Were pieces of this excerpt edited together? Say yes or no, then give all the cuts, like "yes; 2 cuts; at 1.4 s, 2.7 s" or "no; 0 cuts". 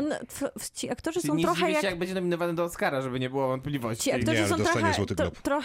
no; 0 cuts